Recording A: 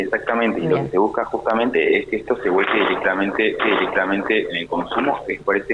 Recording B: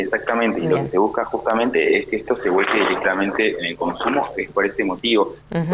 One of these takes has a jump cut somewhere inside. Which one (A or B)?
A